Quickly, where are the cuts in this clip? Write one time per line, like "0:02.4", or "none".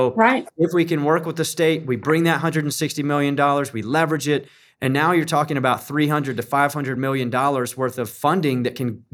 none